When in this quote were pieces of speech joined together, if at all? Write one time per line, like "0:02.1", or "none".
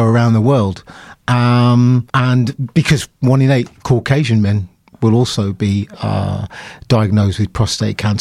0:02.1